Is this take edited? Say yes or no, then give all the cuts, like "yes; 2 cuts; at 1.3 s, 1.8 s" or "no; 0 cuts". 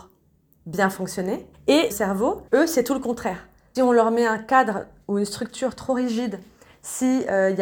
yes; 4 cuts; at 1.5 s, 1.9 s, 2.5 s, 3.7 s